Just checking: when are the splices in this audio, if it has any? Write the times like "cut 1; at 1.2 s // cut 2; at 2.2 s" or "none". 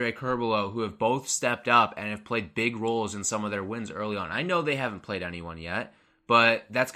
none